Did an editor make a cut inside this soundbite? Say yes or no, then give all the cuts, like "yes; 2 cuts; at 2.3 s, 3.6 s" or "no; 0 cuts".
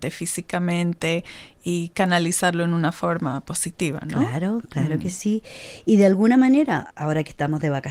no; 0 cuts